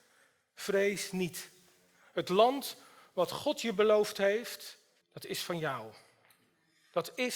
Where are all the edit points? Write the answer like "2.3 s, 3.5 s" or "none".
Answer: 5.0 s